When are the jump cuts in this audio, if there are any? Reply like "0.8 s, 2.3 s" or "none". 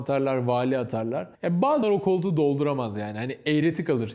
1.3 s, 1.8 s